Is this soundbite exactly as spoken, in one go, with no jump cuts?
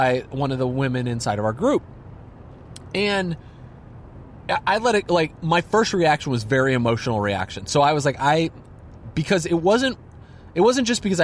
yes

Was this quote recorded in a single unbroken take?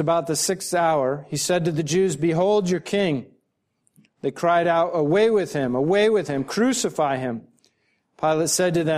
yes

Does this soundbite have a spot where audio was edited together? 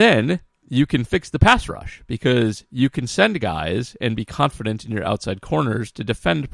no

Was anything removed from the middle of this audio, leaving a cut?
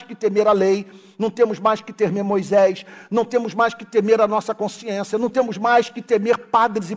no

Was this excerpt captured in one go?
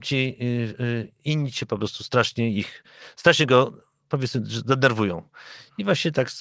yes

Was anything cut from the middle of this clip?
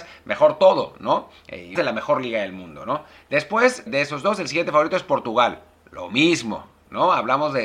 yes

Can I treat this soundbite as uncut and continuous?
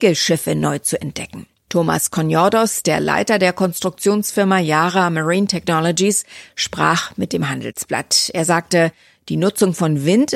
yes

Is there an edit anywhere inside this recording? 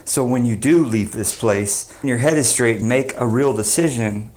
yes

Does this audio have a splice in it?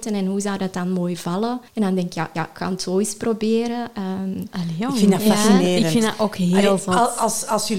yes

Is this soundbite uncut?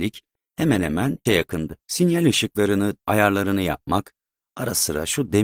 no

